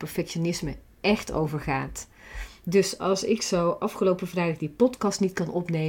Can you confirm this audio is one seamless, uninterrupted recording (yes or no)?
yes